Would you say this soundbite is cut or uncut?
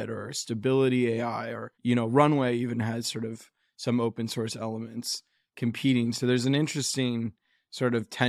cut